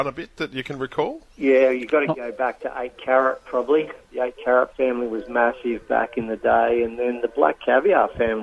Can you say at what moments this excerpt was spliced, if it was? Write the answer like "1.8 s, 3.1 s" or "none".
1.3 s